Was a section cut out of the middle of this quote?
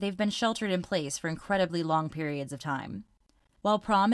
no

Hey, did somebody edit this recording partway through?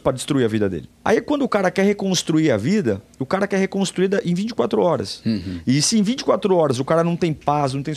yes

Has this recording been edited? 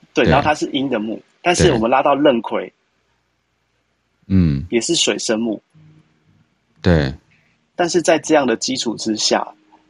no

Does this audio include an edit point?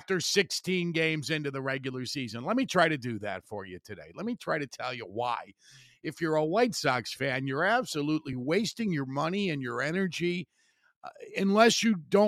no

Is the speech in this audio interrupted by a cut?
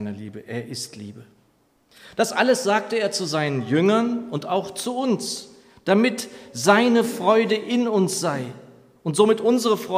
no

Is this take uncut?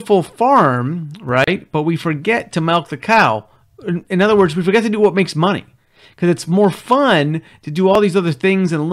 yes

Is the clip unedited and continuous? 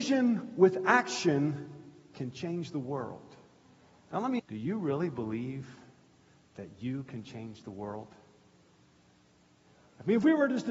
no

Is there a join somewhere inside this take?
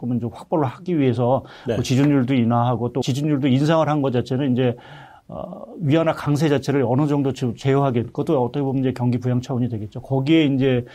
yes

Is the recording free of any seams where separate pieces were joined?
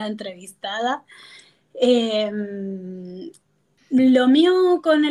no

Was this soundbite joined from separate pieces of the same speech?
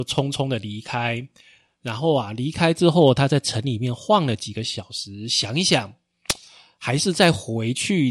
no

